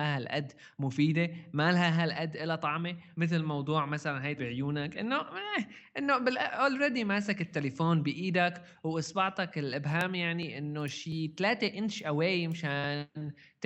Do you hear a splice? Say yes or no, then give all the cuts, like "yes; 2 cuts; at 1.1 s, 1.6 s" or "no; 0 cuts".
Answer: yes; 1 cut; at 4.4 s